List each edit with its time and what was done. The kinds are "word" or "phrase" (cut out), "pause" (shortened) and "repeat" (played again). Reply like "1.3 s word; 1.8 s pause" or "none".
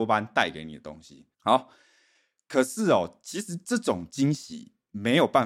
1.3 s pause